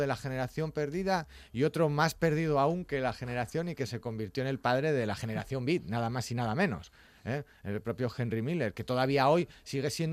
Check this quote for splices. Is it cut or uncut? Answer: uncut